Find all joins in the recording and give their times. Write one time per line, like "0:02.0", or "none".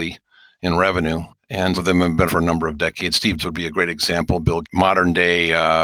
0:01.7
0:02.3
0:03.4
0:04.6